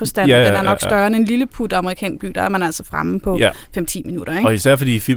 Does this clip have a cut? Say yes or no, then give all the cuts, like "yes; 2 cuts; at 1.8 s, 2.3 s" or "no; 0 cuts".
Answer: no; 0 cuts